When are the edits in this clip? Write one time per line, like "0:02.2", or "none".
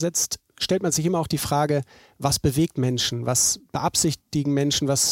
none